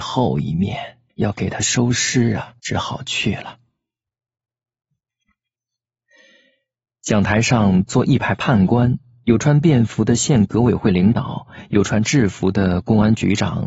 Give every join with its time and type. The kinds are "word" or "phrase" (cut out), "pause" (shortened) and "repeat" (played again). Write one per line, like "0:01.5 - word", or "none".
0:01.1 - pause
0:02.6 - pause